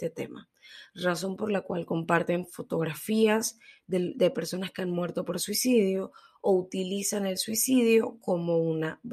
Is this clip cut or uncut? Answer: uncut